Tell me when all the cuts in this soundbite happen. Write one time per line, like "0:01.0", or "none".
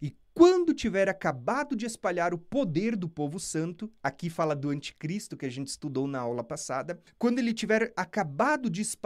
0:07.1